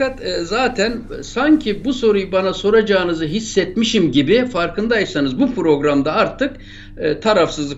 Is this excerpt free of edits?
yes; 0 cuts

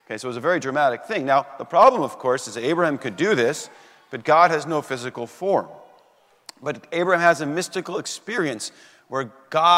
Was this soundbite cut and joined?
no; 0 cuts

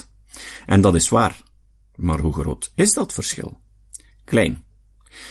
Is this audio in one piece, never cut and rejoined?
yes; 0 cuts

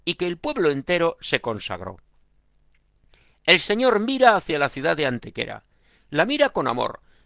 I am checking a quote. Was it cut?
no; 0 cuts

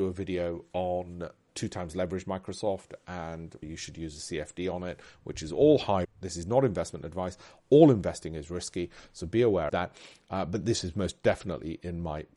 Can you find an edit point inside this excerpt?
yes; 4 cuts; at 1.5 s, 3.6 s, 6.0 s, 9.7 s

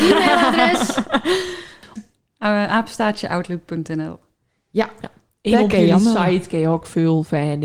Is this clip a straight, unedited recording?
no; 1 cut; at 2.0 s

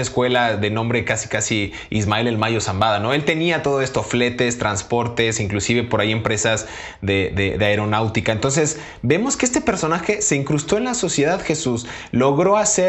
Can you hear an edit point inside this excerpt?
no; 0 cuts

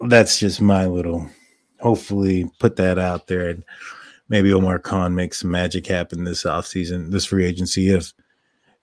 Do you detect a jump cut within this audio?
no; 0 cuts

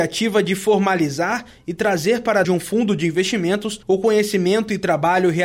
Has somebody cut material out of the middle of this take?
yes; 2 cuts; at 2.4 s, 3.8 s

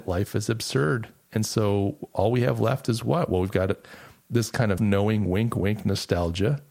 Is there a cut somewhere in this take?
yes; 1 cut; at 4.8 s

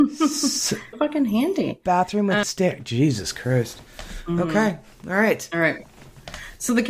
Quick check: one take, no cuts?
no; 2 cuts; at 0.9 s, 2.4 s

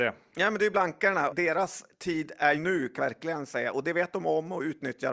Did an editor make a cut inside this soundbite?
yes; 3 cuts; at 1.3 s, 2.5 s, 3.0 s

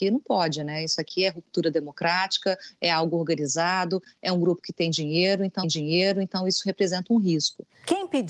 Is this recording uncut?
no; 1 cut; at 5.6 s

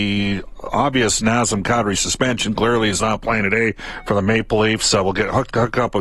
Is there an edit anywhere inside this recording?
no; 0 cuts

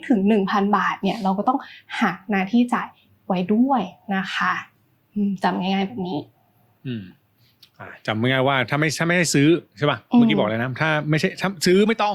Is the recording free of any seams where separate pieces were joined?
yes; 0 cuts

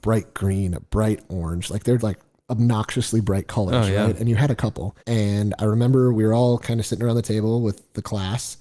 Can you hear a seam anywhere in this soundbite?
yes; 2 cuts; at 2.0 s, 5.0 s

